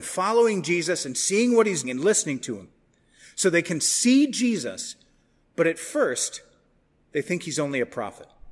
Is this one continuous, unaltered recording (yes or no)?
no